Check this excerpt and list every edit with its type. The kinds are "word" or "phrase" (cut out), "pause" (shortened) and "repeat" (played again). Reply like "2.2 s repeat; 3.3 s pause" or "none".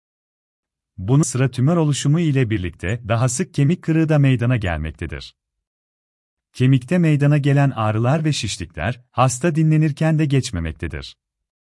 1.2 s word